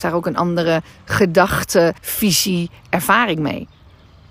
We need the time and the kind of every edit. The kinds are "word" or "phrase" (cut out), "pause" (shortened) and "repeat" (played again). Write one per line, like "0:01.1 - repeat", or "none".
0:02.0 - pause

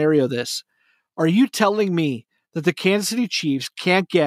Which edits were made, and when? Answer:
none

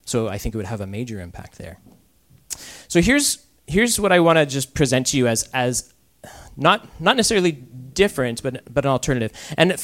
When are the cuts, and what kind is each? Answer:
0:03.6 - pause

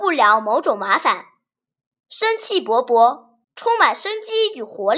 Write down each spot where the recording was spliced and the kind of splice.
0:03.4 - pause

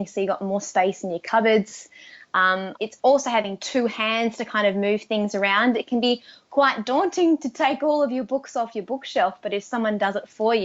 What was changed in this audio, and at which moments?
0:02.8 - phrase

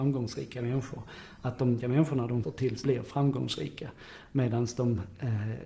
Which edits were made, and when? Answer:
0:01.8 - word
0:02.4 - word
0:02.8 - word

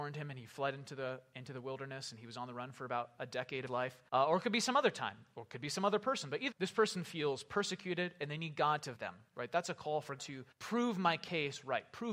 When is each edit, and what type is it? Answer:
0:03.7 - phrase
0:04.1 - pause
0:06.5 - word
0:09.0 - word
0:10.2 - word
0:10.5 - pause

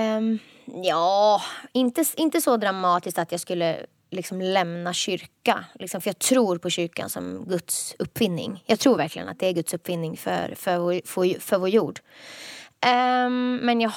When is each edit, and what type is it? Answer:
none

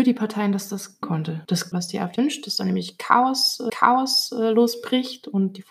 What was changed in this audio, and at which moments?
0:01.0 - word
0:01.7 - phrase
0:02.2 - word
0:03.7 - repeat

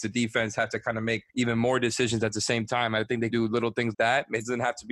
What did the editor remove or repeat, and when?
0:01.3 - pause
0:03.3 - word
0:03.9 - word

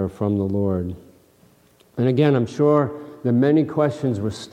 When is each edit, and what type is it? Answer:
none

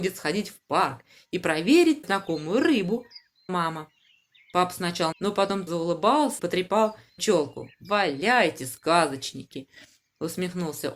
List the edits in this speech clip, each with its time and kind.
0:02.0 - word
0:03.5 - word
0:05.1 - word
0:05.7 - word
0:06.4 - word
0:07.2 - word

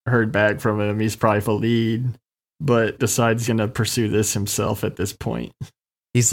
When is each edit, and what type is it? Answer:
0:01.4 - phrase
0:03.0 - word
0:03.5 - word

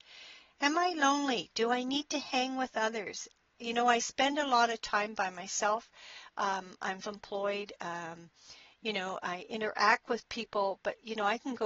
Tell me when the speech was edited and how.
0:07.0 - word

